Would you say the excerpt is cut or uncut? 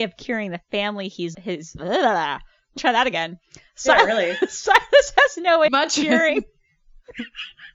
cut